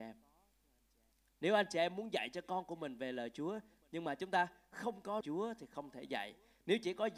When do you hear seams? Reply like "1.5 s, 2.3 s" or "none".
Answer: 5.2 s